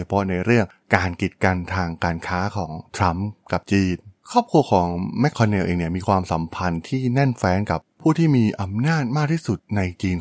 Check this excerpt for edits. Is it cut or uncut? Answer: cut